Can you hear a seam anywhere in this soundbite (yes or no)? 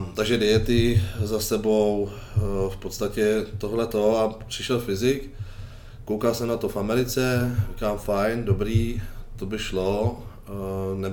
no